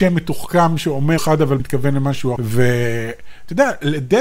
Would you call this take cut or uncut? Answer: cut